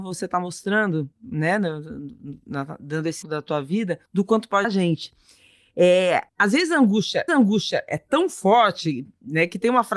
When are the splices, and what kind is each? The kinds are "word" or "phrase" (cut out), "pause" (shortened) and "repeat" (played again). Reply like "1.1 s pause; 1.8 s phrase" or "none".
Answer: 3.2 s word; 4.1 s pause; 4.6 s word; 6.3 s pause; 7.3 s repeat